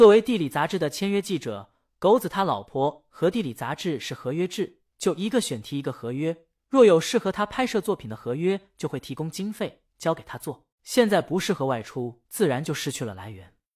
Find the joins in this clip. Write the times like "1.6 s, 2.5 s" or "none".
10.7 s, 12.3 s